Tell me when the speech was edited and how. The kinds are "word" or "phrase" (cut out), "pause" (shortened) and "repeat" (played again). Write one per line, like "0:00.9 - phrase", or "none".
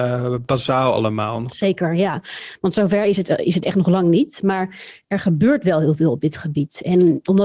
none